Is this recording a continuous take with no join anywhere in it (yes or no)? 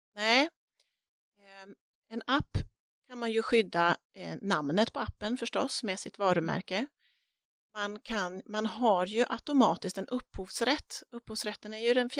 yes